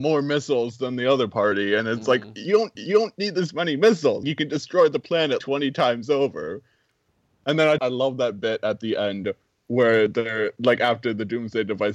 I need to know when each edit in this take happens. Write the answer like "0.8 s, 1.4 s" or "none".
2.7 s, 4.2 s, 5.4 s, 7.8 s